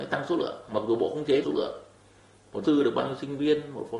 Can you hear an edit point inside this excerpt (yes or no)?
yes